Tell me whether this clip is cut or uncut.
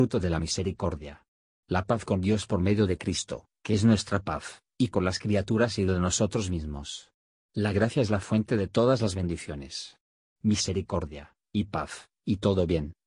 uncut